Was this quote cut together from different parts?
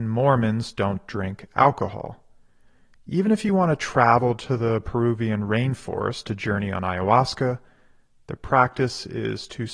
no; 0 cuts

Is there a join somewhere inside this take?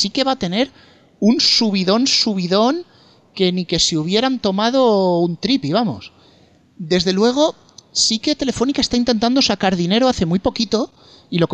no; 0 cuts

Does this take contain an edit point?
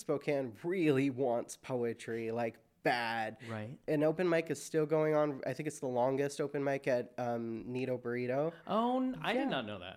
no; 0 cuts

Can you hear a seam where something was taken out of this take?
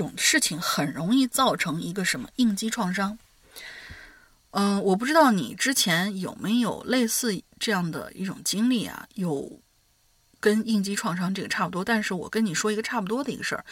no; 0 cuts

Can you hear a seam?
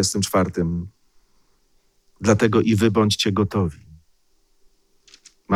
no; 0 cuts

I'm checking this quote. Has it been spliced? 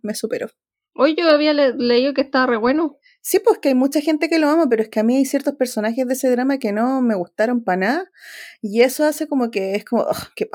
no; 0 cuts

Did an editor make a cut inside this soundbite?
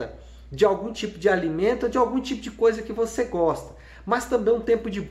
no; 0 cuts

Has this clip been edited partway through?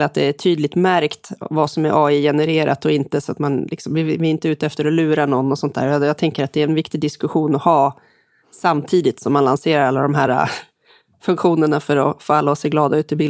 no; 0 cuts

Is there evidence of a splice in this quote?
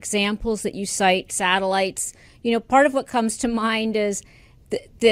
no; 0 cuts

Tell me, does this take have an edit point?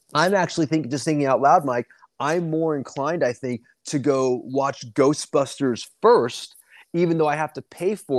no; 0 cuts

